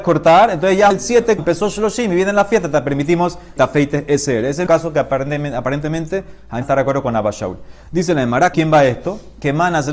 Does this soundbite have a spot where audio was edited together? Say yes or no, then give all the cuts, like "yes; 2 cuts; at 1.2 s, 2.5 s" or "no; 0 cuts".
yes; 6 cuts; at 0.9 s, 1.4 s, 3.6 s, 4.7 s, 6.6 s, 8.5 s